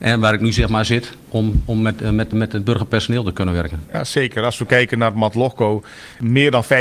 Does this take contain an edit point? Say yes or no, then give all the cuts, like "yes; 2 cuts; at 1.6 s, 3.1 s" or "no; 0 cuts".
yes; 1 cut; at 2.3 s